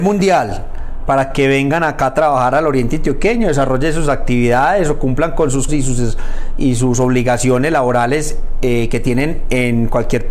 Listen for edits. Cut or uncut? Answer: cut